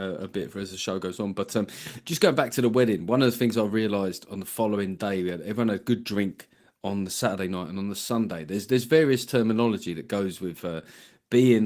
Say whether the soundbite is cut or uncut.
uncut